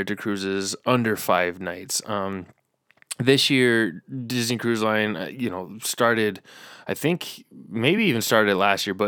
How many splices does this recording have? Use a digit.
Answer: 0